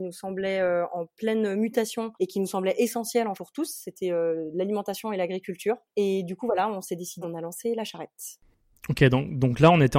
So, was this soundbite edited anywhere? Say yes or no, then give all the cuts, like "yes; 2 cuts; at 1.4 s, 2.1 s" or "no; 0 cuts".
yes; 4 cuts; at 2.1 s, 3.3 s, 5.9 s, 7.2 s